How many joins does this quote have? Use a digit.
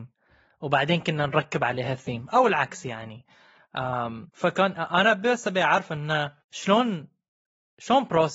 2